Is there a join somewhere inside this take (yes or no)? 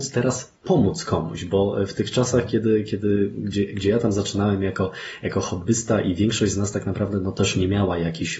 no